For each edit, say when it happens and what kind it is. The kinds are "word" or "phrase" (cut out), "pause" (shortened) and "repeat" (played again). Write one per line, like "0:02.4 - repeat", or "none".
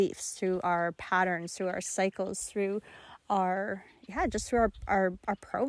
none